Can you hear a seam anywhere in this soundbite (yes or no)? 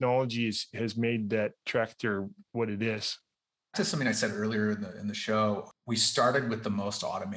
yes